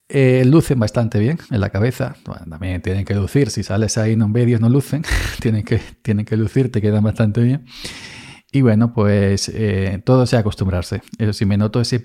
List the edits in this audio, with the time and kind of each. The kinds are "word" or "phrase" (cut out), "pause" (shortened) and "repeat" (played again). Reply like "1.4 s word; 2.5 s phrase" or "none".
1.5 s pause; 11.1 s pause